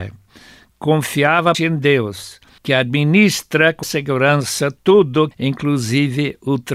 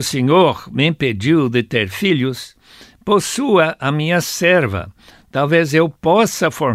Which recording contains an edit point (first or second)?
first